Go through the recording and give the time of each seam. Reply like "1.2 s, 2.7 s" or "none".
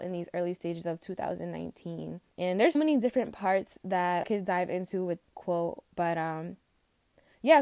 2.3 s, 2.7 s, 4.2 s, 5.2 s, 5.9 s